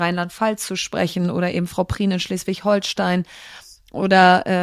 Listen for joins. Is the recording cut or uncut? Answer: uncut